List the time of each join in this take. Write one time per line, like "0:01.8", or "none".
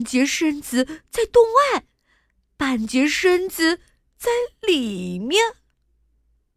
none